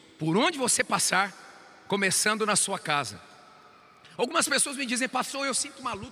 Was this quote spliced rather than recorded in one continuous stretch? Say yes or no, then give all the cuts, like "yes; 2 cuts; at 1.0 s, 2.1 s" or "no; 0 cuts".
no; 0 cuts